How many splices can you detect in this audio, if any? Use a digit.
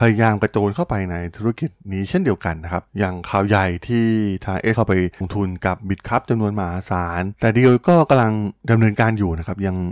2